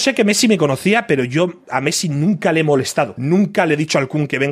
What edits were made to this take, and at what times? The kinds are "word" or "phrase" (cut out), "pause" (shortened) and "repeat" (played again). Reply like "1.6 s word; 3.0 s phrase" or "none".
none